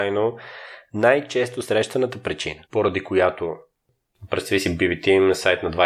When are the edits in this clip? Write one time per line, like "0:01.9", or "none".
0:02.6